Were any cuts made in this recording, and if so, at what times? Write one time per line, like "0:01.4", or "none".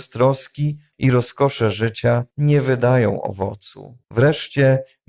0:00.9
0:02.3
0:04.0